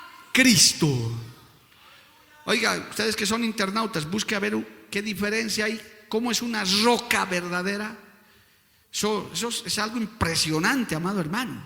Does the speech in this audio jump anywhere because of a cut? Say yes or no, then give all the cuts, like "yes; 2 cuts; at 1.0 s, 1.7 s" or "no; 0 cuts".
no; 0 cuts